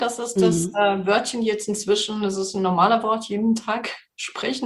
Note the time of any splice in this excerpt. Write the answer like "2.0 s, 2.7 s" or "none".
none